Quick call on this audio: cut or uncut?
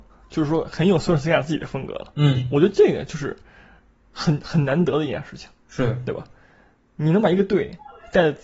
uncut